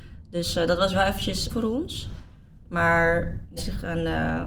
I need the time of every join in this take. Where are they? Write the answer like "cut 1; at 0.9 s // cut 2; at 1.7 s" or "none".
cut 1; at 1.5 s // cut 2; at 3.6 s